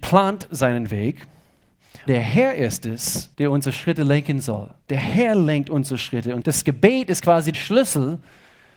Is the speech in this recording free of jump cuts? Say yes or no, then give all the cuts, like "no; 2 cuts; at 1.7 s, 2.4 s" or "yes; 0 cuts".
no; 5 cuts; at 2.1 s, 3.3 s, 4.8 s, 6.4 s, 7.5 s